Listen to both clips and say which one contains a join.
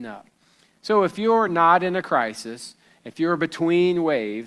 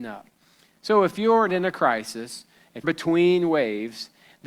second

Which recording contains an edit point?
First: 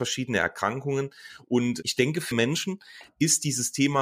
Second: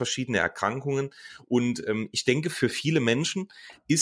first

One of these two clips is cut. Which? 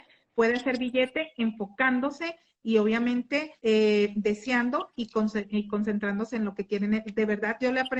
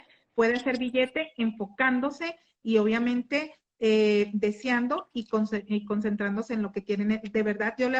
first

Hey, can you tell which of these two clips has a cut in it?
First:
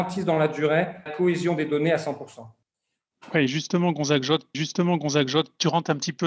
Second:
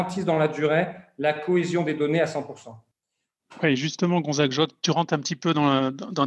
first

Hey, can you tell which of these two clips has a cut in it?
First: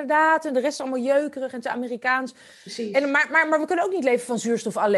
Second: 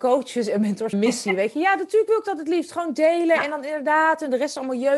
second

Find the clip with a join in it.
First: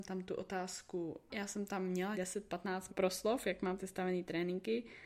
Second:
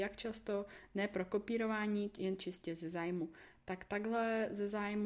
first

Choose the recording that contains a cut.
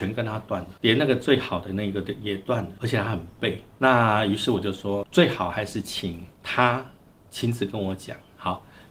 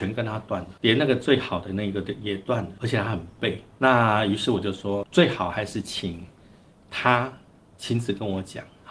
first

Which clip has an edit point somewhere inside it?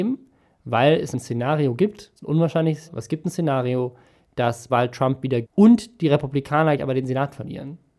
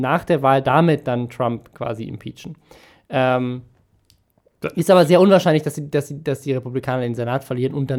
first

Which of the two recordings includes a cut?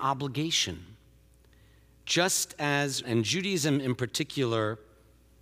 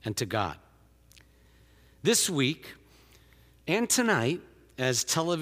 first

